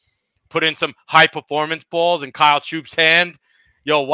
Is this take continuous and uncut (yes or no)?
yes